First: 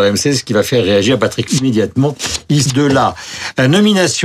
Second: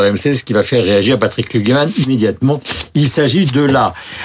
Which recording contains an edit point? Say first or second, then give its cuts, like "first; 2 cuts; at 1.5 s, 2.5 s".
first; 2 cuts; at 1.5 s, 2.7 s